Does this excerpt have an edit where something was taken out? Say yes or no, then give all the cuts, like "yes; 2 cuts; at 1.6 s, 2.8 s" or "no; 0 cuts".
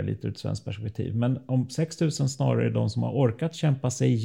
no; 0 cuts